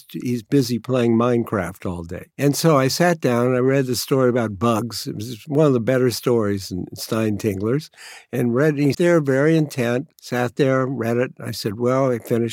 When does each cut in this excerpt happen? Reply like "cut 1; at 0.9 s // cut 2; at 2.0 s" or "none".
cut 1; at 2.3 s // cut 2; at 8.9 s // cut 3; at 10.1 s